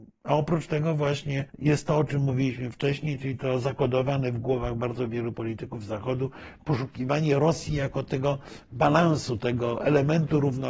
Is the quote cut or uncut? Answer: cut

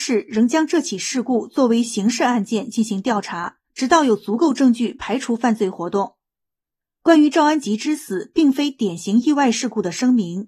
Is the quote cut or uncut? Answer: cut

